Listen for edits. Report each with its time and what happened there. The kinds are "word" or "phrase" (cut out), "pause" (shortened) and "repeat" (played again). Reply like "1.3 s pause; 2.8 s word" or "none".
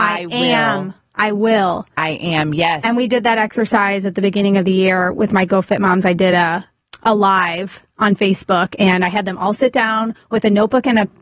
none